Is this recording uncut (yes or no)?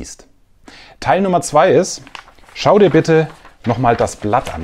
yes